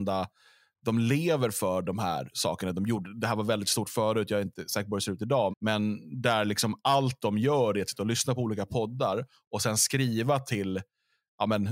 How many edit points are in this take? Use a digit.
1